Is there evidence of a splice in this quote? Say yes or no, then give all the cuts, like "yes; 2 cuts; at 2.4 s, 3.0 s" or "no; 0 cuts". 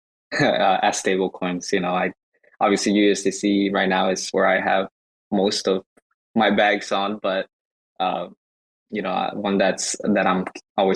no; 0 cuts